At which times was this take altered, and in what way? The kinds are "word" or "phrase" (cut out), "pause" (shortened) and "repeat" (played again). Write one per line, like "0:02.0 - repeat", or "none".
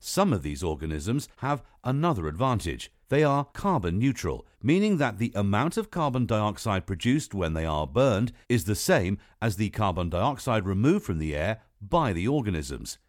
0:01.3 - pause
0:03.0 - pause
0:03.5 - pause
0:04.5 - pause
0:08.4 - pause